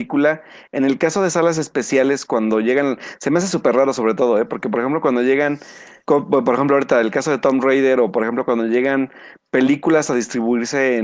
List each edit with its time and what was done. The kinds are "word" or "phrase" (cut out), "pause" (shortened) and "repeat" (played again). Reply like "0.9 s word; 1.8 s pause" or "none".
6.0 s pause